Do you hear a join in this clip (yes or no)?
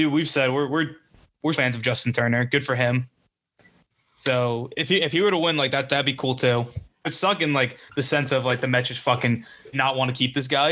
yes